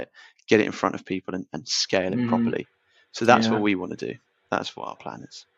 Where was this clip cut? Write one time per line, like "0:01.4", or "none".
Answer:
none